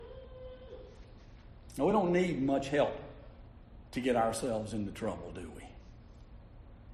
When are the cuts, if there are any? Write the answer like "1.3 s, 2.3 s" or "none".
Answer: none

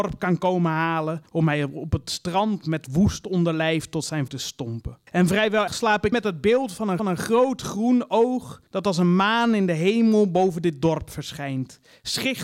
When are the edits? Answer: 1.3 s, 4.3 s, 5.1 s, 5.7 s, 6.1 s, 7.0 s, 8.7 s

